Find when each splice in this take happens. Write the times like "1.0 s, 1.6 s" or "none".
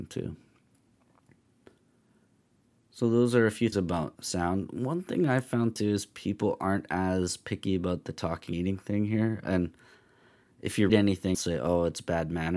3.7 s, 4.2 s, 8.5 s, 10.9 s, 11.3 s

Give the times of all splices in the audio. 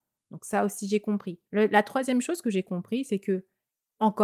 1.5 s

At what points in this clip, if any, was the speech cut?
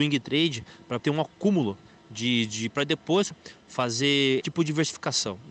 1.0 s, 2.7 s, 3.3 s, 4.4 s

